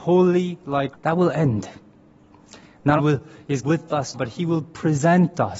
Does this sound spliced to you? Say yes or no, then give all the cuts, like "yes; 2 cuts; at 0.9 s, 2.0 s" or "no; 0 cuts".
yes; 4 cuts; at 0.9 s, 3.0 s, 3.6 s, 4.1 s